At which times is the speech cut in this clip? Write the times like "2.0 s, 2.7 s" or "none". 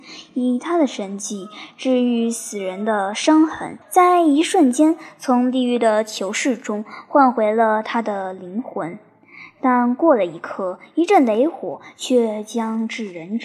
3.8 s